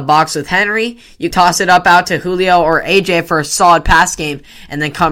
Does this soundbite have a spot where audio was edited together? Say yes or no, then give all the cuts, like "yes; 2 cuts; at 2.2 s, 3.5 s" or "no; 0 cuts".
yes; 1 cut; at 1.3 s